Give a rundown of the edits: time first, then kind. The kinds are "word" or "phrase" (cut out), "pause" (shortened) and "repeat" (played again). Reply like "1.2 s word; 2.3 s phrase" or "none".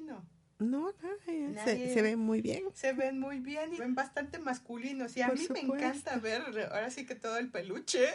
3.8 s word